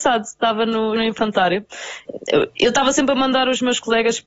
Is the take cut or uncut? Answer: cut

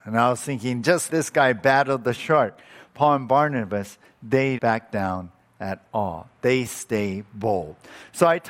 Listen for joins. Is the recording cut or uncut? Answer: cut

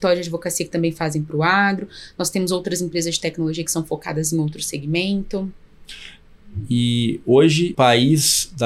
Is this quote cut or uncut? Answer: cut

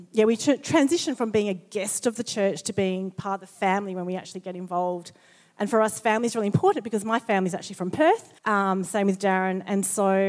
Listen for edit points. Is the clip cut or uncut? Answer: cut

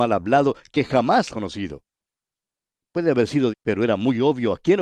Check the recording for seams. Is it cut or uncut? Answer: cut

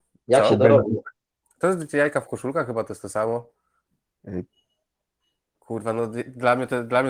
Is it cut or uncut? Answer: uncut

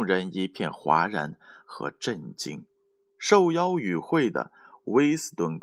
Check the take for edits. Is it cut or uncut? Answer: uncut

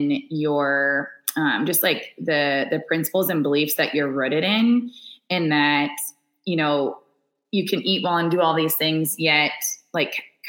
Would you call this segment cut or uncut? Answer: uncut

